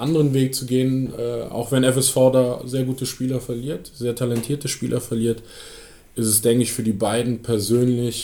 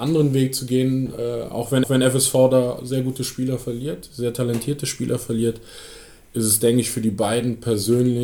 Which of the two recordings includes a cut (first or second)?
second